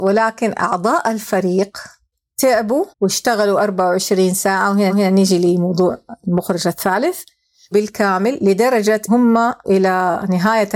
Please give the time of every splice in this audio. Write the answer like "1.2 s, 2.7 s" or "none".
2.9 s, 4.9 s, 7.7 s, 9.1 s, 9.6 s